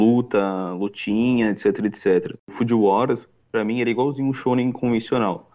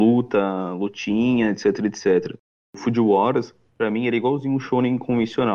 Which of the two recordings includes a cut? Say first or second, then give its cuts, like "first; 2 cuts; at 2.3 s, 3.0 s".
first; 1 cut; at 2.4 s